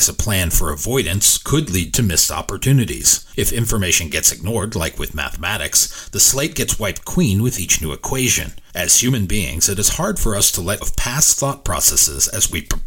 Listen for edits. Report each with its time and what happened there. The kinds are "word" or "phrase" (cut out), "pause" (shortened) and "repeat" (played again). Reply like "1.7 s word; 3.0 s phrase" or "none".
10.8 s word